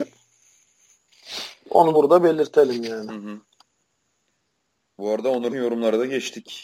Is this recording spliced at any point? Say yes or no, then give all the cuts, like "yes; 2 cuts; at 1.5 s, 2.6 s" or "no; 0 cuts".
yes; 2 cuts; at 1.9 s, 5.5 s